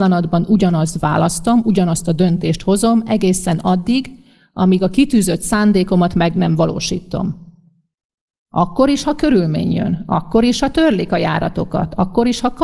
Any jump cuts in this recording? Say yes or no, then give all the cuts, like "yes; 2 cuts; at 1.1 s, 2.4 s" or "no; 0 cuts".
no; 0 cuts